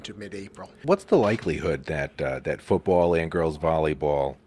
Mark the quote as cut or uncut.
uncut